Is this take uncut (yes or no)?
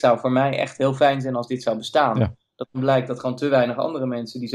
yes